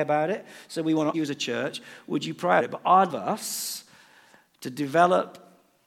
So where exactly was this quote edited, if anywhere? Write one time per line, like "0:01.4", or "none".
0:01.1
0:02.6
0:03.1

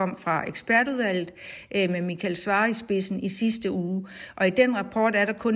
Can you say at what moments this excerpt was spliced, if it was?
none

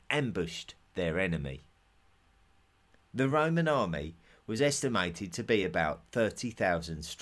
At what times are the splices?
none

